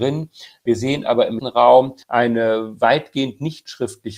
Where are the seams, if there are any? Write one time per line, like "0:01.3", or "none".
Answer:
0:01.4
0:02.0